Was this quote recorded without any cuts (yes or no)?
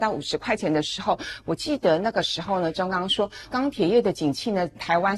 no